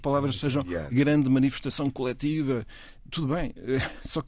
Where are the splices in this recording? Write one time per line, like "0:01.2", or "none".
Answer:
0:00.9